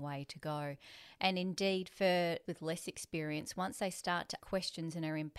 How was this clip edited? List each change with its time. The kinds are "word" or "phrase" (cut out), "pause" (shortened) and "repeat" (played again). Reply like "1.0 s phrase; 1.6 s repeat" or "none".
2.5 s word; 4.4 s word